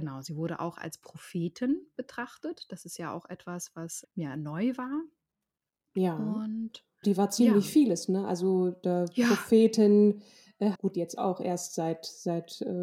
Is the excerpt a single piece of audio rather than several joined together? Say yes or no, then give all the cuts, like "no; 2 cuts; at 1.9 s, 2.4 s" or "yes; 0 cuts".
no; 3 cuts; at 4.0 s, 7.0 s, 10.7 s